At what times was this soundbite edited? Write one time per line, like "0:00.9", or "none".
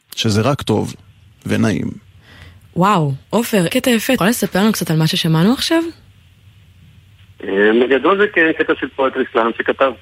0:03.7
0:04.2